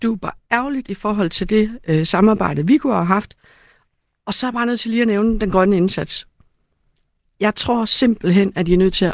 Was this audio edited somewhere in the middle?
no; 0 cuts

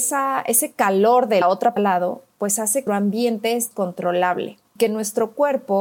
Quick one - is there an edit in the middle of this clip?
yes; 5 cuts; at 1.4 s, 1.8 s, 2.9 s, 3.7 s, 4.8 s

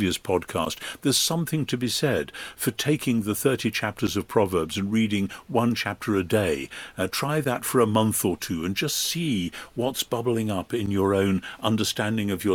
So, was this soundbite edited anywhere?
no; 0 cuts

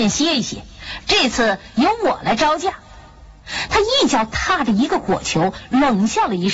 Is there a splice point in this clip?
yes; 1 cut; at 3.1 s

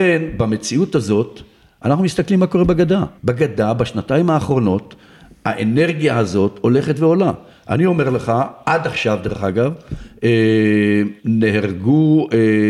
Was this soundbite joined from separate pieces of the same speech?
yes; 2 cuts; at 3.2 s, 11.2 s

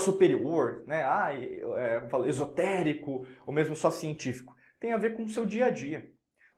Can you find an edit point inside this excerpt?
no; 0 cuts

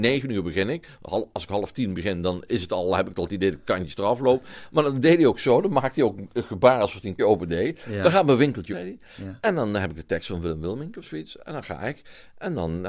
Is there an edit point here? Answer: yes; 2 cuts; at 7.2 s, 8.7 s

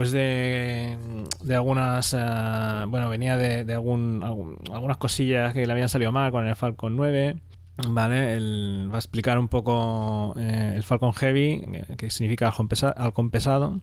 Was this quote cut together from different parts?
no; 0 cuts

